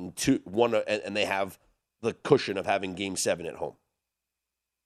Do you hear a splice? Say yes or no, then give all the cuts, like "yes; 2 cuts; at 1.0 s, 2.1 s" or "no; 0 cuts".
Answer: no; 0 cuts